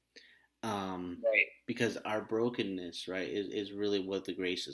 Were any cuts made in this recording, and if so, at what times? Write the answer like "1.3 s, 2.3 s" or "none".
none